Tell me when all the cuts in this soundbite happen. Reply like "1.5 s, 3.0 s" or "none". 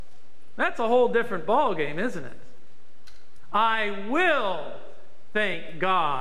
none